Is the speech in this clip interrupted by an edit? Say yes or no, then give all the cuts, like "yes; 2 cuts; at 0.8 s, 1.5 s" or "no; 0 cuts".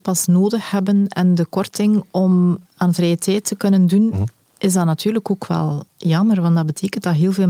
yes; 3 cuts; at 2.6 s, 4.4 s, 5.9 s